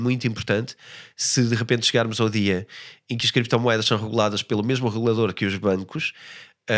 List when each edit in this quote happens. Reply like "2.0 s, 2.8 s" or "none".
none